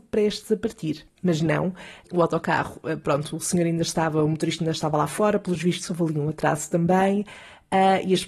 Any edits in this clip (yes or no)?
no